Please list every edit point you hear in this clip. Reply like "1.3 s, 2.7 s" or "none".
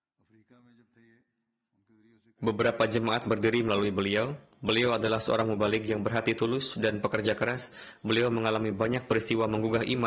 none